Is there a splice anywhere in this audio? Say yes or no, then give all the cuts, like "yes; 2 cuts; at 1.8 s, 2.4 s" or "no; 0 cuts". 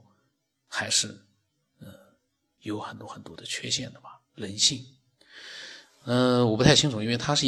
no; 0 cuts